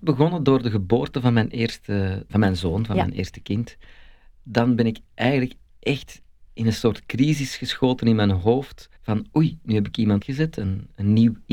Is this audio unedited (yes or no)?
no